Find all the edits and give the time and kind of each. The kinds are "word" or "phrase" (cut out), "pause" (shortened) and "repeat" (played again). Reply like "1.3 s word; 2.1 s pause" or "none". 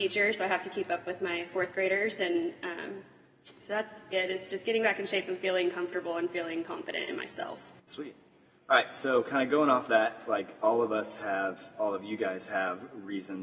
4.1 s word; 7.8 s pause